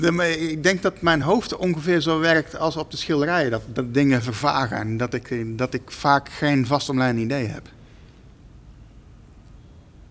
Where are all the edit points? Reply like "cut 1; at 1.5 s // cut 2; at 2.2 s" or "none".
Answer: none